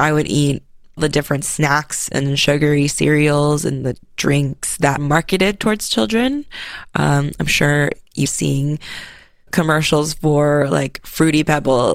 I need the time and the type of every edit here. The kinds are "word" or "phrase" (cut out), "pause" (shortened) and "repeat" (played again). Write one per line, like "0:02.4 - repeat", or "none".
0:01.0 - word
0:05.0 - word
0:08.3 - word
0:09.5 - word